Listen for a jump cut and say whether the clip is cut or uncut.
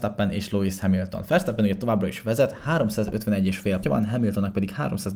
cut